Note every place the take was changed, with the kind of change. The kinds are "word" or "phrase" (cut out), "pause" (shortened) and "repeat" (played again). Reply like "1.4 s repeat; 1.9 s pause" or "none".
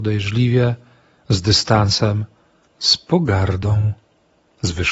none